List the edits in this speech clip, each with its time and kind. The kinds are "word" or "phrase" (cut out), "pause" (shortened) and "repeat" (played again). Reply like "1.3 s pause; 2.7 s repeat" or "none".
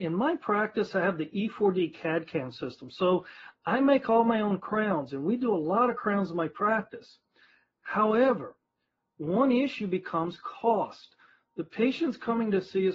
none